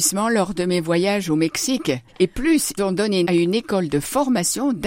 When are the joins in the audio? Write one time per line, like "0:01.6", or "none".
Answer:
0:02.1
0:02.8
0:03.3

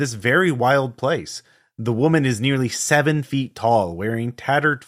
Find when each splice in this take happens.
none

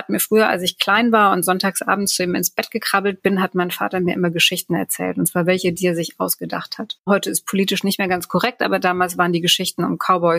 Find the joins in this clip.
none

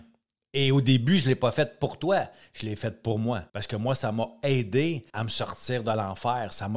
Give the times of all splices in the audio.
0:03.5
0:05.1

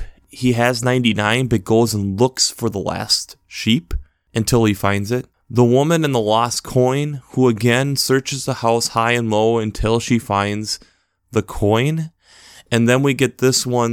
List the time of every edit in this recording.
none

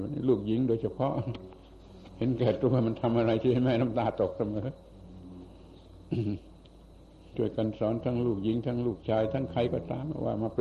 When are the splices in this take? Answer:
0:06.9

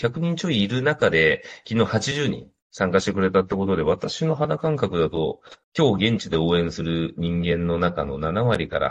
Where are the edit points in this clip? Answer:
0:02.6
0:05.6

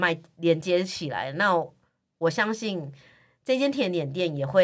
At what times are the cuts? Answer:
none

